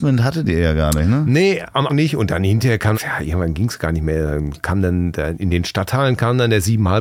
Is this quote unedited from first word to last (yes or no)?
no